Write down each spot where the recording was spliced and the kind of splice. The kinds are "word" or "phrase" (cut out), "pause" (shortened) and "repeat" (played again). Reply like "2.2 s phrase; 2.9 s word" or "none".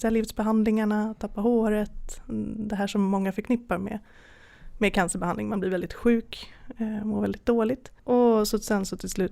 8.0 s pause